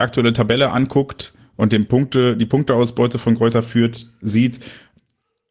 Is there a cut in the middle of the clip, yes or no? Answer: no